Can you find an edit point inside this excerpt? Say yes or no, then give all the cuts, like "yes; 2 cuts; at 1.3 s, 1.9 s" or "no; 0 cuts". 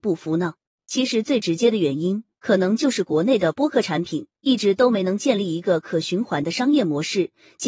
no; 0 cuts